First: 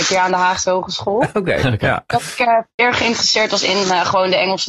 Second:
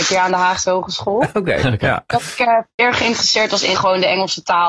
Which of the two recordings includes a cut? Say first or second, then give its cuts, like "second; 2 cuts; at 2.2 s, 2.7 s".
second; 1 cut; at 3.7 s